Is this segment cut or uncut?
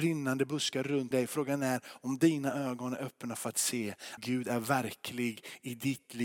cut